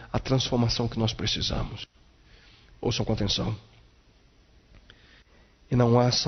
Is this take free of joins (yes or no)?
yes